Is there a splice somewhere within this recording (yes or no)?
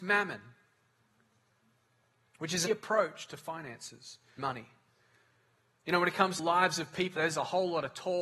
yes